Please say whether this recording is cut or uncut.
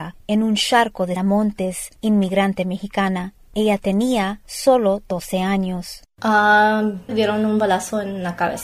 cut